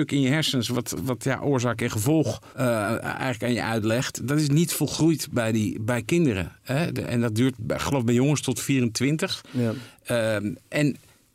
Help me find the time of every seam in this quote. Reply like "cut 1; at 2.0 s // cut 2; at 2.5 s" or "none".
cut 1; at 1.0 s // cut 2; at 2.5 s // cut 3; at 7.6 s